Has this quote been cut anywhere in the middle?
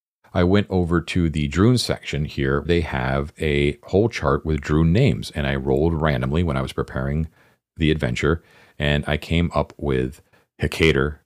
yes; 1 cut; at 2.6 s

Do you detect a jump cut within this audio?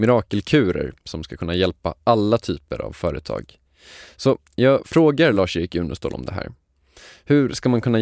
no; 0 cuts

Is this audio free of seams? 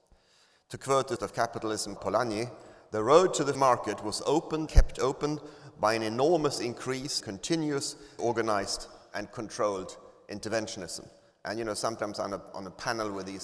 no; 6 cuts; at 1.2 s, 2.0 s, 3.6 s, 4.7 s, 7.2 s, 8.2 s

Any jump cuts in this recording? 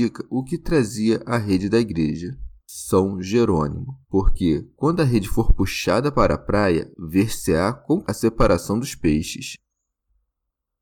yes; 3 cuts; at 2.6 s, 4.0 s, 8.0 s

